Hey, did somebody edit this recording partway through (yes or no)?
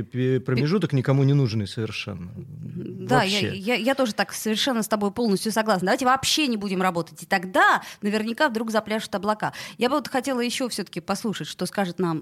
no